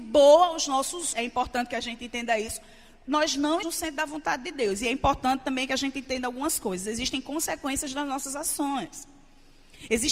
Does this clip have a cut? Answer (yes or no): yes